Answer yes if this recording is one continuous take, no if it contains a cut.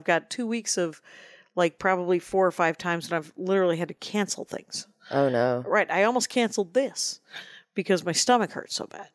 yes